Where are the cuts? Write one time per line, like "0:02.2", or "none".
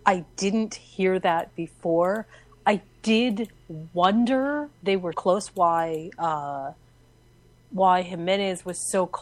0:04.7
0:05.1